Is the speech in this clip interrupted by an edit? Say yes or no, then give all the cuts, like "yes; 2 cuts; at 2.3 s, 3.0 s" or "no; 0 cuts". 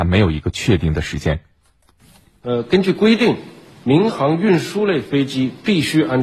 no; 0 cuts